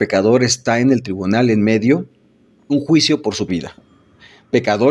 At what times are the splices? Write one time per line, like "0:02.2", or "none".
0:02.7
0:03.5